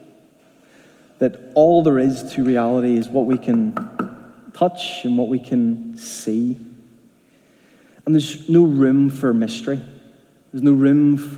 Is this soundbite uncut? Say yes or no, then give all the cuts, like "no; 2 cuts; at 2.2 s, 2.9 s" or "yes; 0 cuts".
yes; 0 cuts